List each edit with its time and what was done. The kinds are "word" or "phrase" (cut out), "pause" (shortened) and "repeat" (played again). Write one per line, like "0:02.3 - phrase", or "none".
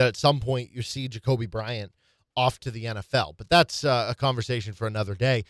none